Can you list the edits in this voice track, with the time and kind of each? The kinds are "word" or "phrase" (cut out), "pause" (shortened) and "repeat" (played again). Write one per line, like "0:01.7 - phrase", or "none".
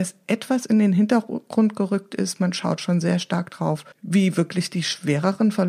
0:03.9 - pause